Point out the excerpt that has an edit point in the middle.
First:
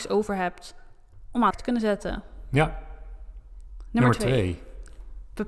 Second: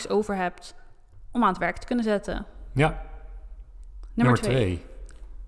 first; 1 cut; at 1.5 s

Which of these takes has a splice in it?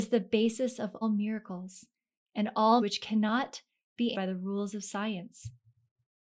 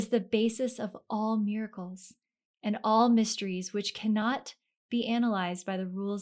first; 3 cuts; at 1.0 s, 2.8 s, 4.1 s

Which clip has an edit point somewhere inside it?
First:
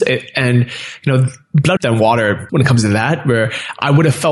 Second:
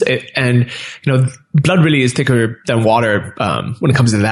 first; 2 cuts; at 1.8 s, 2.5 s

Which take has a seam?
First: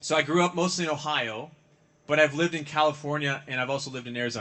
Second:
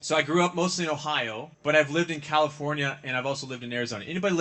second; 1 cut; at 1.5 s

